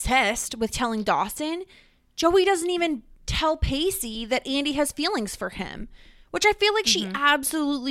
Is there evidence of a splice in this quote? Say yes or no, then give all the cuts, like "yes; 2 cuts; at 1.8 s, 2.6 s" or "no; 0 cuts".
no; 0 cuts